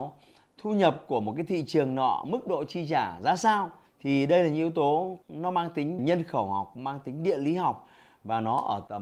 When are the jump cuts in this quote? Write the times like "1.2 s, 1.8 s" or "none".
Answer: 6.0 s